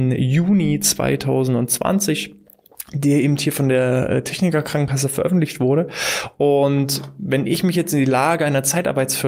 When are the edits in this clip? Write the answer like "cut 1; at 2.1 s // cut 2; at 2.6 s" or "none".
none